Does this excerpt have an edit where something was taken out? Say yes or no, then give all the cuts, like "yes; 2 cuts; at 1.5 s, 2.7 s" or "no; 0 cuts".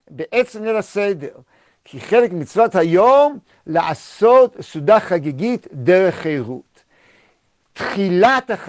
no; 0 cuts